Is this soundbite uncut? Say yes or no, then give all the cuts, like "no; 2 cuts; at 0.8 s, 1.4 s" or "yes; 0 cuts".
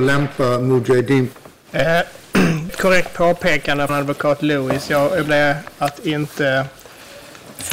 no; 3 cuts; at 2.7 s, 3.9 s, 5.3 s